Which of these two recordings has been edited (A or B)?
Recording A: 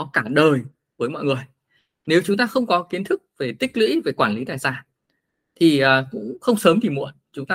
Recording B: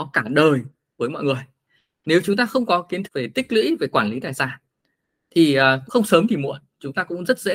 B